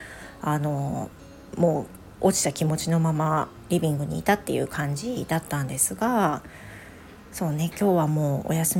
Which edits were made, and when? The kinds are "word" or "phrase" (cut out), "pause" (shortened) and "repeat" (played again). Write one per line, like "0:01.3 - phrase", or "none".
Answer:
none

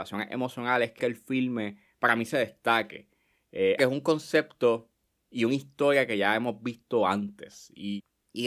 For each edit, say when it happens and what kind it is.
0:01.0 - word
0:03.8 - phrase

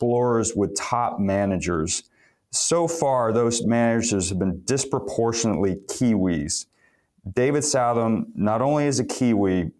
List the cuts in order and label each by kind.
none

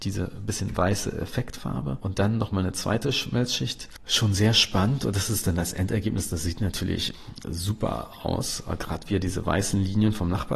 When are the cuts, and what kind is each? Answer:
0:07.4 - word

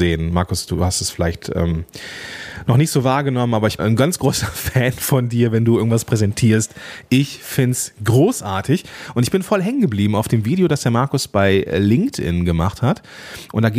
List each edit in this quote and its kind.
0:03.8 - word

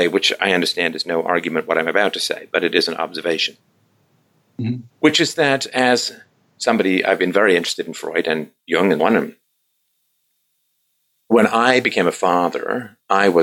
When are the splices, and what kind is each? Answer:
0:04.9 - pause
0:09.0 - word

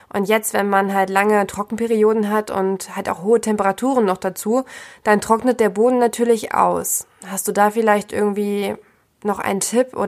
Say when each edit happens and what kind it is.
none

